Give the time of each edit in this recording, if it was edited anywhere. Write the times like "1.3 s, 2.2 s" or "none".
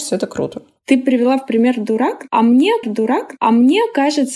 2.8 s